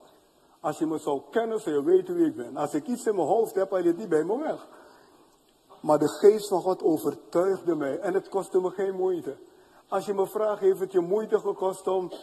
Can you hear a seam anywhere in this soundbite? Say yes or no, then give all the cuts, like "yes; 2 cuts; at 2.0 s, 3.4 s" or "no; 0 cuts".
no; 0 cuts